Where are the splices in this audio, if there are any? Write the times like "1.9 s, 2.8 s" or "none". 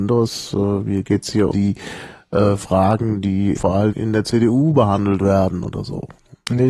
1.5 s, 3.6 s, 3.9 s

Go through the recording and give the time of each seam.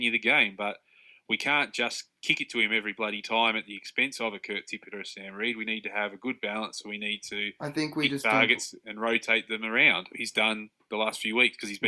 10.1 s

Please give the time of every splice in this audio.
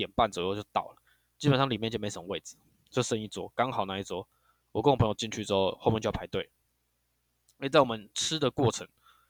none

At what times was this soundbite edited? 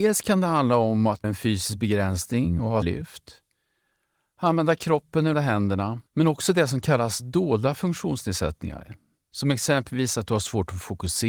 1.2 s, 2.8 s, 5.3 s, 6.1 s

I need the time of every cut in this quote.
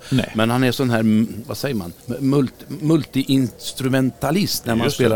2.0 s, 3.6 s

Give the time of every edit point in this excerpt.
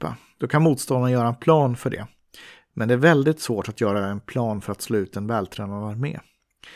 none

